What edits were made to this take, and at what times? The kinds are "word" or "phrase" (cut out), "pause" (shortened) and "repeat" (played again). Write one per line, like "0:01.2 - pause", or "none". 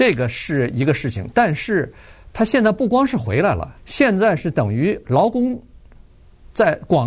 0:03.8 - pause